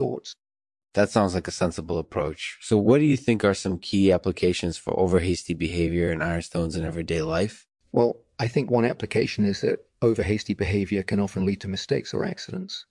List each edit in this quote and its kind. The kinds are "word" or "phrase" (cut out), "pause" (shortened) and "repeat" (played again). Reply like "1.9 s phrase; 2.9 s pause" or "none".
7.8 s pause